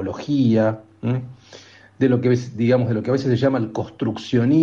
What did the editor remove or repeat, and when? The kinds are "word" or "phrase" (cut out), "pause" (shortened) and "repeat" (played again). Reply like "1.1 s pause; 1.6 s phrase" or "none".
none